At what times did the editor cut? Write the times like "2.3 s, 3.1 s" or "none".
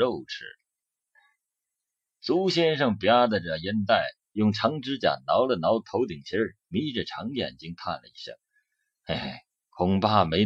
6.6 s, 8.4 s